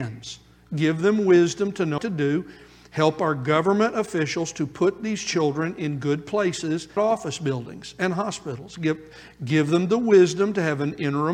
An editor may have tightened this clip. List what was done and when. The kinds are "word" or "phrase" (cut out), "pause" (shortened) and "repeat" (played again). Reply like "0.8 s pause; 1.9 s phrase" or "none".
2.0 s word; 7.0 s word

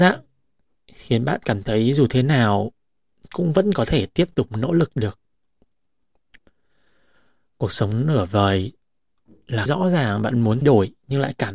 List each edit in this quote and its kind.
9.7 s word; 10.6 s word

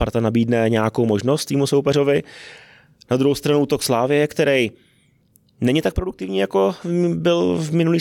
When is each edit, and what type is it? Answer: none

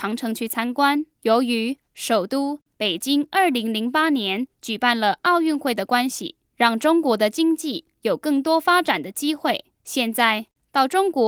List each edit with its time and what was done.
1.1 s pause; 1.8 s pause; 4.5 s pause; 6.5 s pause; 7.9 s pause; 9.7 s pause

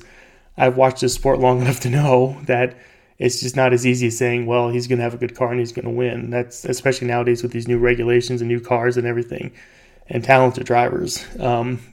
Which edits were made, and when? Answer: none

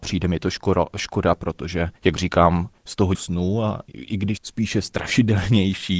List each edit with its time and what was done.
2.0 s pause; 2.8 s pause; 3.1 s phrase; 3.9 s word; 4.4 s word

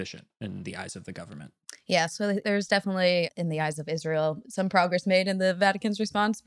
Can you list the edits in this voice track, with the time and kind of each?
none

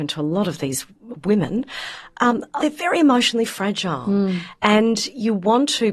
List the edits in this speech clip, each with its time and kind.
2.6 s word

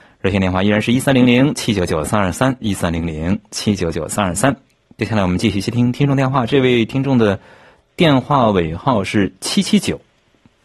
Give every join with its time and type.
none

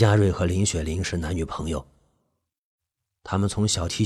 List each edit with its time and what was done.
none

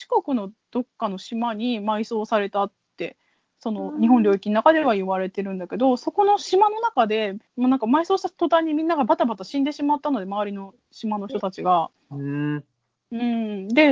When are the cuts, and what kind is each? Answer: 7.5 s pause

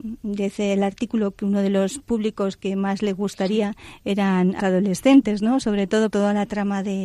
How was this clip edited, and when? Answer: 4.6 s word; 6.1 s word

